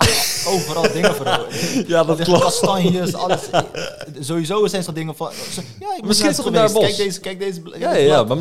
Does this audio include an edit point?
yes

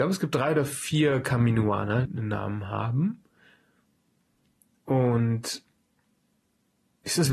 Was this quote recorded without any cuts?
no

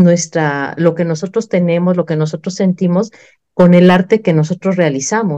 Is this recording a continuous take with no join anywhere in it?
yes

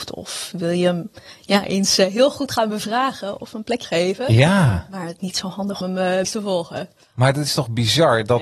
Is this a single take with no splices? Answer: no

